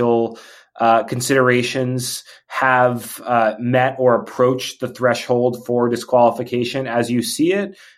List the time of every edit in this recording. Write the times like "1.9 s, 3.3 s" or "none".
none